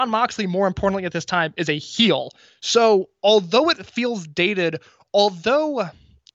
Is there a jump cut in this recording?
no; 0 cuts

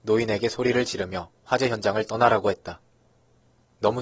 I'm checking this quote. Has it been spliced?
no; 0 cuts

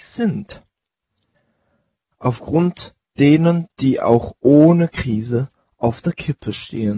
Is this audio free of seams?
yes; 0 cuts

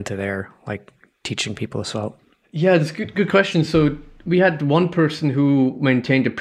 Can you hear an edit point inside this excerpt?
no; 0 cuts

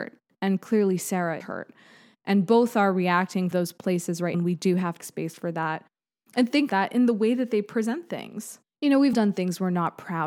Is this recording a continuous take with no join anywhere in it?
no; 6 cuts; at 1.4 s, 3.5 s, 4.3 s, 5.0 s, 6.7 s, 9.1 s

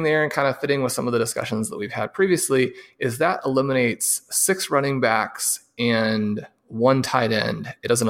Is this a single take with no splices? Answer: yes; 0 cuts

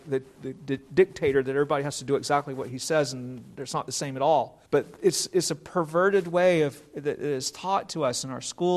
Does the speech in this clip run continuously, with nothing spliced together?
no; 1 cut; at 4.7 s

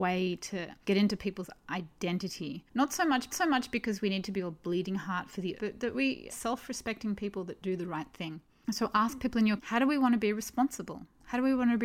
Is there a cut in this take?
yes; 4 cuts; at 3.3 s, 5.6 s, 6.3 s, 9.6 s

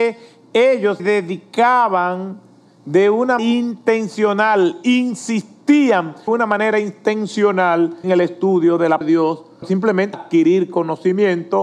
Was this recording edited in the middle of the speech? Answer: yes; 7 cuts; at 1.0 s, 3.4 s, 6.3 s, 8.0 s, 9.0 s, 9.6 s, 10.1 s

